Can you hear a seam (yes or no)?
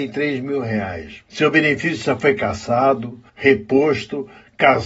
yes